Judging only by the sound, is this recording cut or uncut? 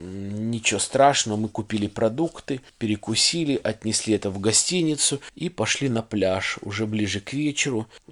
uncut